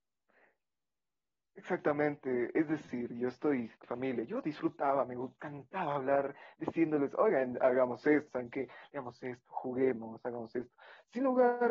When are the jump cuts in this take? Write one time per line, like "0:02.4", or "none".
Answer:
0:03.8
0:08.3